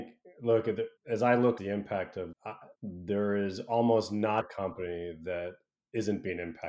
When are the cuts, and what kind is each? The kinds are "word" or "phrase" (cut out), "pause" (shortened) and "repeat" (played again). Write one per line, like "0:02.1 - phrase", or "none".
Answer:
0:01.0 - pause
0:01.6 - word
0:02.3 - phrase
0:02.8 - pause
0:04.4 - phrase